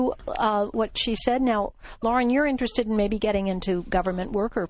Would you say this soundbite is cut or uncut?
uncut